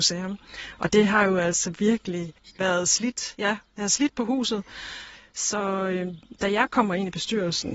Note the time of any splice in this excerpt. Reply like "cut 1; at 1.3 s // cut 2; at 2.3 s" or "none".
none